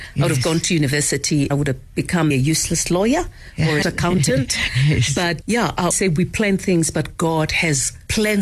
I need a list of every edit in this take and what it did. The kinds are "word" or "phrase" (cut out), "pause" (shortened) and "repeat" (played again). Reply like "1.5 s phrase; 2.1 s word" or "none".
1.5 s word; 2.3 s word; 3.8 s phrase; 5.4 s word; 5.9 s word